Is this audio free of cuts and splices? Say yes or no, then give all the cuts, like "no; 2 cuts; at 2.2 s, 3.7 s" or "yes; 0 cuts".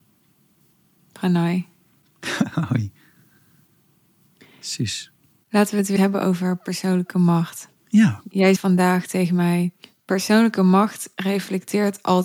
no; 4 cuts; at 6.0 s, 7.8 s, 8.6 s, 9.8 s